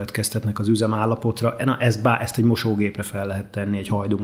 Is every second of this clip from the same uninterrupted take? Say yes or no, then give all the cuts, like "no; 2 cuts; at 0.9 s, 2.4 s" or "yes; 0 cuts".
yes; 0 cuts